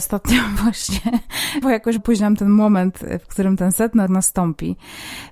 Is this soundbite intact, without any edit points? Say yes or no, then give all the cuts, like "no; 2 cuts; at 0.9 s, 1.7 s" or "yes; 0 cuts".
no; 3 cuts; at 1.6 s, 2.0 s, 4.1 s